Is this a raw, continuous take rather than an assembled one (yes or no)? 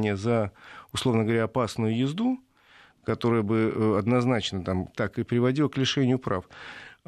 no